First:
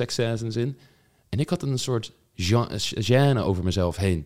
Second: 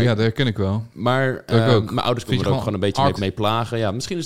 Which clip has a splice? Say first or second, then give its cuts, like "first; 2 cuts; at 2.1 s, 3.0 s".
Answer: second; 1 cut; at 3.2 s